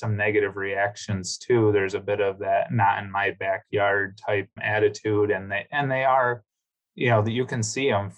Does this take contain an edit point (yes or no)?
yes